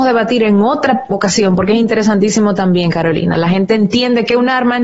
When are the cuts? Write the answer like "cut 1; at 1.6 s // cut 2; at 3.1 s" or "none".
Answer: none